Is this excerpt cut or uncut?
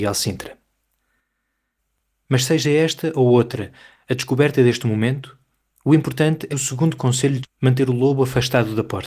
cut